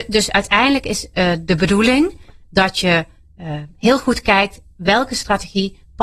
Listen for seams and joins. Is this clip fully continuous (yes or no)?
yes